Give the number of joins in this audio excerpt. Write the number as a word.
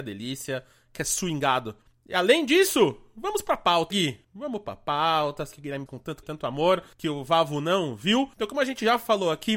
eight